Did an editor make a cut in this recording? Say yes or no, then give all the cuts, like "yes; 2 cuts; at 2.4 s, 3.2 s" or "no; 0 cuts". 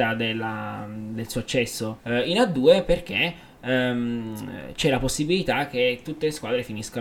yes; 1 cut; at 2.0 s